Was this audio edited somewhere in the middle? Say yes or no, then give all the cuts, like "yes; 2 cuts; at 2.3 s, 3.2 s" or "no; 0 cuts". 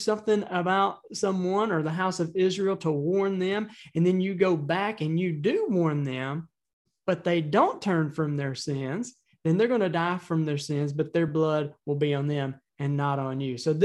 no; 0 cuts